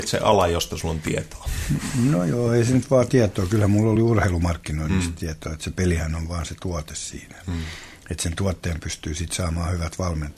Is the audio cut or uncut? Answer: uncut